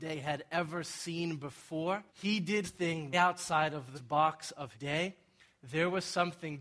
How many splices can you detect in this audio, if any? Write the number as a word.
five